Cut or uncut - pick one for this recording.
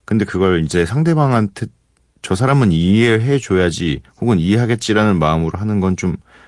uncut